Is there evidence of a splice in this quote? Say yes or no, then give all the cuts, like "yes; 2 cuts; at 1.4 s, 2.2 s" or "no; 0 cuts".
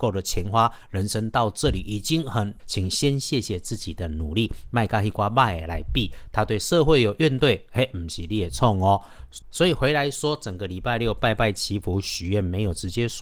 yes; 1 cut; at 2.6 s